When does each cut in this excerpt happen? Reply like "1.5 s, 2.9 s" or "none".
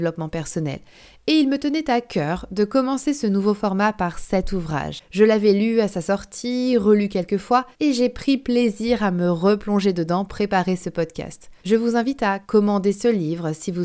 7.7 s, 10.3 s, 11.6 s, 12.4 s